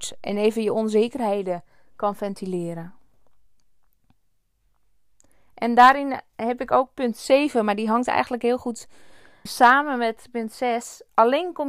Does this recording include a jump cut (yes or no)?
yes